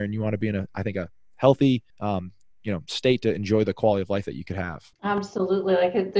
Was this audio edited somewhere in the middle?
yes; 2 cuts; at 1.9 s, 4.9 s

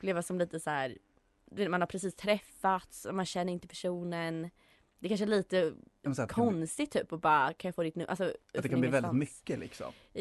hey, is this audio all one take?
yes; 0 cuts

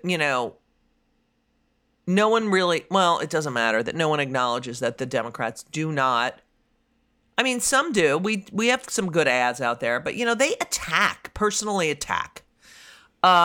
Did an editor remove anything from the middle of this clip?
no; 0 cuts

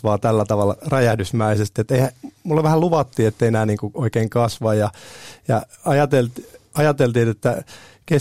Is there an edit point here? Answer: no; 0 cuts

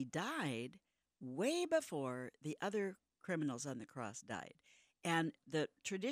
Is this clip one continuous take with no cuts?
yes; 0 cuts

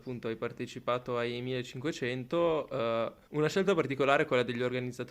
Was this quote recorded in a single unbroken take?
no; 1 cut; at 3.3 s

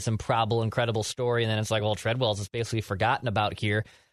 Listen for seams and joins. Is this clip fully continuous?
yes; 0 cuts

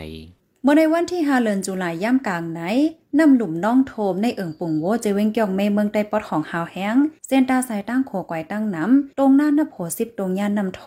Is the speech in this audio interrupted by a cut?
yes; 1 cut; at 9.1 s

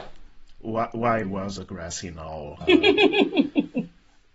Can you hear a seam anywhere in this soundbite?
yes; 3 cuts; at 1.2 s, 1.6 s, 2.6 s

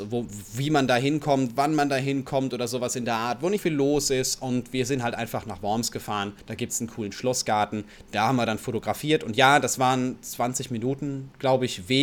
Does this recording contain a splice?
yes; 2 cuts; at 3.6 s, 6.4 s

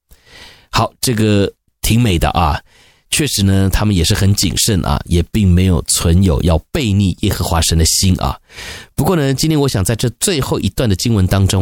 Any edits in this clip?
no; 0 cuts

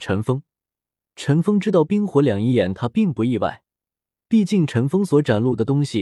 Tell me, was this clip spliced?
no; 0 cuts

